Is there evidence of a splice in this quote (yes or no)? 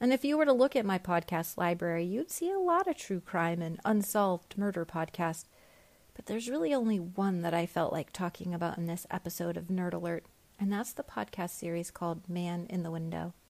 no